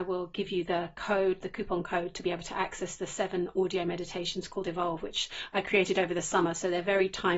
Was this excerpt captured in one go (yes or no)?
yes